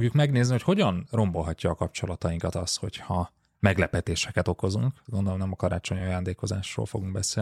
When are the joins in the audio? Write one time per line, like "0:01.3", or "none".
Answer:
none